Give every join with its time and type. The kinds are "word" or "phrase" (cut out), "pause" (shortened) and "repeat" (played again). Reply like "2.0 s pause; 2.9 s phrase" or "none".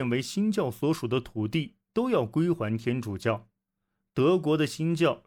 none